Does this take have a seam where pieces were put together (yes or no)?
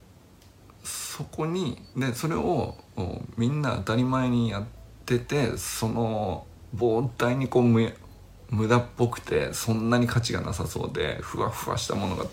yes